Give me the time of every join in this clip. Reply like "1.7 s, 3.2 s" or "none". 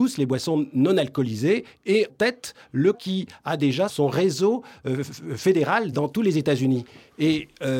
2.1 s, 2.9 s, 3.9 s, 5.9 s